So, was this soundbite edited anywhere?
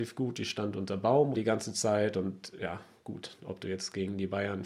yes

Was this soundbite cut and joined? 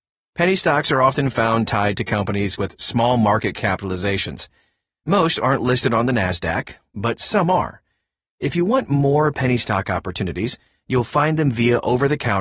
no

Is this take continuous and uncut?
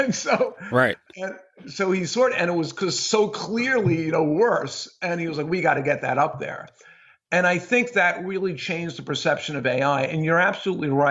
yes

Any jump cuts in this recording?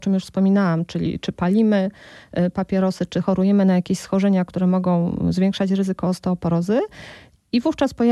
no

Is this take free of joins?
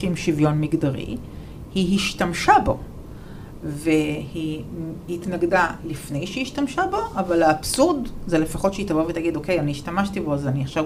yes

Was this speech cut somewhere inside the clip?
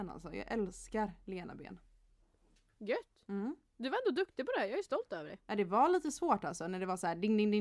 no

